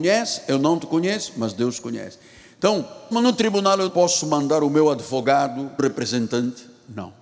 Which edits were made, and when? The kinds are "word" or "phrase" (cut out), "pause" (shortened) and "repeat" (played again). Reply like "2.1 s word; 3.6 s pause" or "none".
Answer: 3.1 s word; 3.9 s word; 5.8 s word